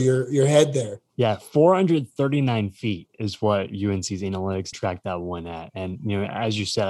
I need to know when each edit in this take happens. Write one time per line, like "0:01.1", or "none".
0:01.1
0:04.7